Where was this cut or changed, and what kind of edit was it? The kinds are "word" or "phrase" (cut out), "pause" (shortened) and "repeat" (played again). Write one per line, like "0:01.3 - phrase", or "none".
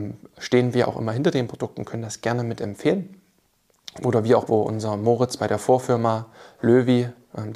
0:04.5 - word

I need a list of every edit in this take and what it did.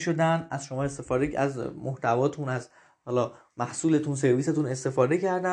none

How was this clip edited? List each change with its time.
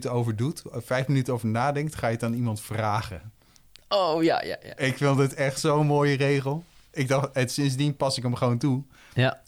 none

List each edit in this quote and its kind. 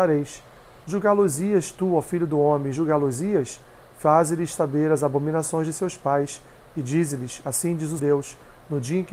0:08.0 - word

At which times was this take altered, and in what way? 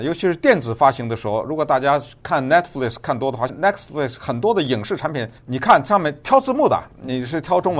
0:03.5 - phrase
0:05.4 - pause

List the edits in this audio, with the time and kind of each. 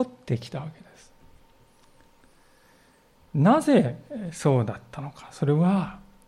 none

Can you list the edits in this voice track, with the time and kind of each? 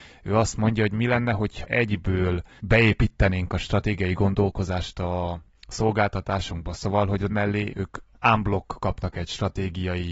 0:01.6 - word
0:07.3 - word

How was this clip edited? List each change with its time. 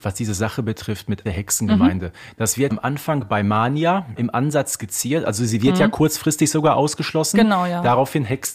0:01.3 - phrase
0:02.7 - word
0:04.2 - word

